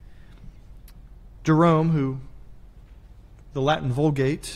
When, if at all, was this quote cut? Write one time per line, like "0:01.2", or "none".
0:03.5